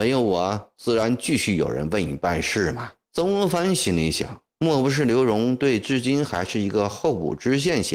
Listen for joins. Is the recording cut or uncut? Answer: cut